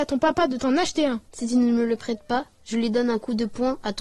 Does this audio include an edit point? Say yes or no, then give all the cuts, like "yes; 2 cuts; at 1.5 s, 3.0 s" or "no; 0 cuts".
yes; 1 cut; at 1.3 s